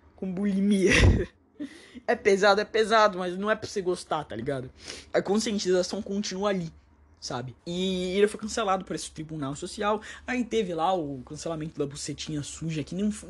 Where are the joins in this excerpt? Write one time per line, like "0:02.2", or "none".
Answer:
0:01.3
0:05.1
0:07.6